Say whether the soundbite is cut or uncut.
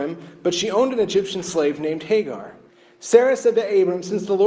cut